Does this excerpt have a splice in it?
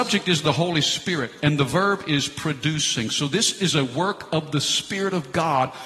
no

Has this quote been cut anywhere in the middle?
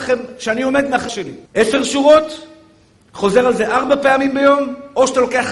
yes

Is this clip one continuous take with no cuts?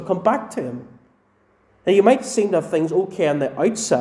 yes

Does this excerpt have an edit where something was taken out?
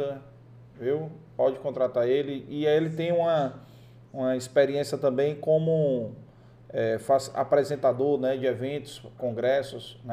no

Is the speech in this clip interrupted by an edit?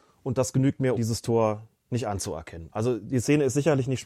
yes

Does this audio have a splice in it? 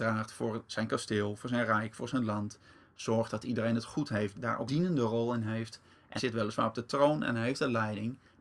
yes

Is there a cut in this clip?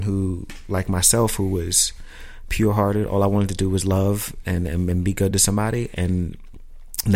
no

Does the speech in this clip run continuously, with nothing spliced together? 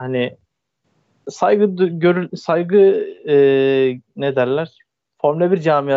yes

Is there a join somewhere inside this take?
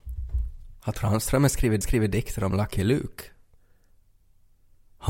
yes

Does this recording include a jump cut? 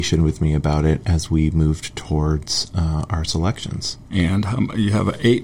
yes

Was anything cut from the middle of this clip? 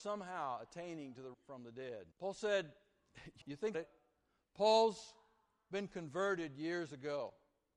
yes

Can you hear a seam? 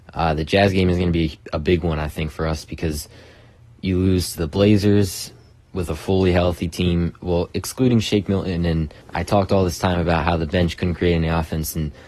yes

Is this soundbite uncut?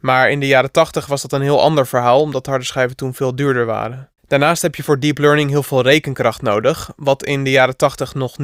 no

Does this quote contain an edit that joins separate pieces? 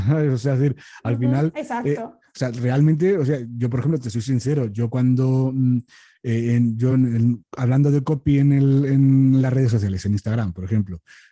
no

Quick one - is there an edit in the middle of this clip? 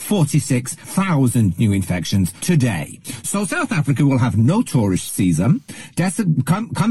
no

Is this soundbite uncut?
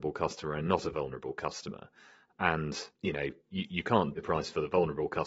no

